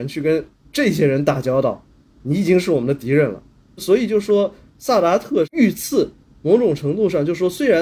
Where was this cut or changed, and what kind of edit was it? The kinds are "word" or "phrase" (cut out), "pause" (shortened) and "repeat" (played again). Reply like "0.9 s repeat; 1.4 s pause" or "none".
none